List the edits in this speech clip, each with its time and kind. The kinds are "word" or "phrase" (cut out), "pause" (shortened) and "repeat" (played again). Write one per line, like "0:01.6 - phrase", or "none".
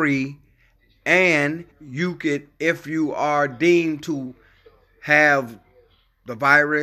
0:01.7 - pause